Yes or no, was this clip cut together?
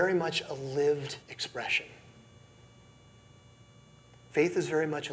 yes